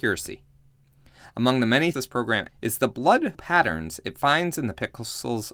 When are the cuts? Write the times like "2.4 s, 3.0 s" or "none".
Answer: 1.9 s, 2.5 s, 3.3 s